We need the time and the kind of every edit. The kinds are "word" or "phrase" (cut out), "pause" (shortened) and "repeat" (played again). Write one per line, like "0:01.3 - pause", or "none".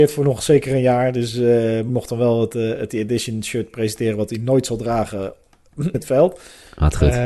0:01.9 - word
0:02.9 - word
0:05.9 - word